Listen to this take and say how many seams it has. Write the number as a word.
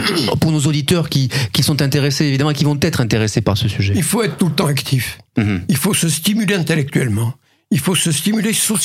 zero